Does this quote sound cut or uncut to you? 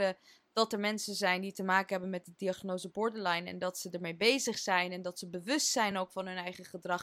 uncut